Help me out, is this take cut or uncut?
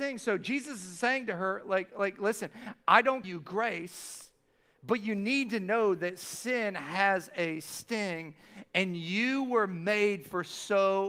cut